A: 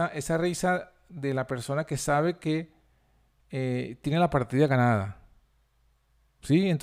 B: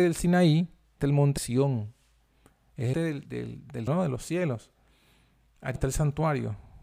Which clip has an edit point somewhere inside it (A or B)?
B